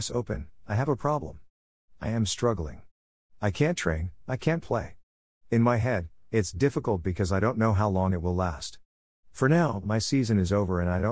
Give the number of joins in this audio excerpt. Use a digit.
0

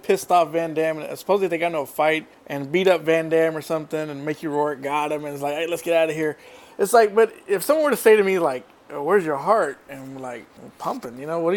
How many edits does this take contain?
0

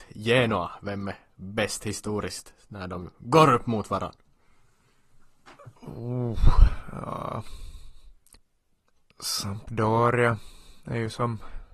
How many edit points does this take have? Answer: 2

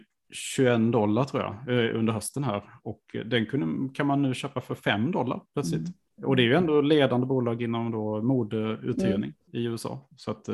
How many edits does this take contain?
1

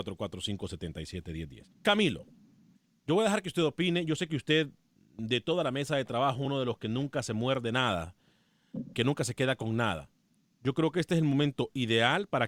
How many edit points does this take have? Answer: 2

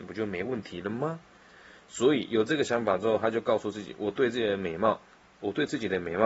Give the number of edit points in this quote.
0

